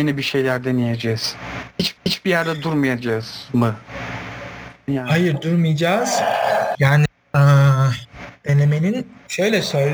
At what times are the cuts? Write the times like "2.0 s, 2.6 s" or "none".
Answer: 2.0 s, 6.7 s